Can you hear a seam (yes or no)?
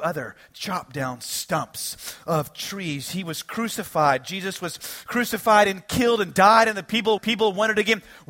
yes